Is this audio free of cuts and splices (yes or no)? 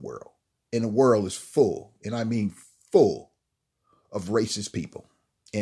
yes